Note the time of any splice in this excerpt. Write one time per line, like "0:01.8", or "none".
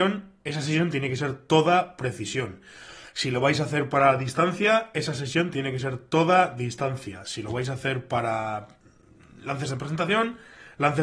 none